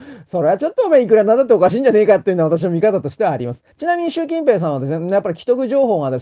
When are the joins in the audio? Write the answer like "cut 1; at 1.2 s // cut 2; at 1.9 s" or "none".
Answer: cut 1; at 3.7 s